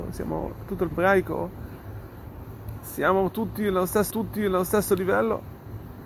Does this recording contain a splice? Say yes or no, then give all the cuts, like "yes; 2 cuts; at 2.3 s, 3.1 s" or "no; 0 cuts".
yes; 2 cuts; at 0.9 s, 4.1 s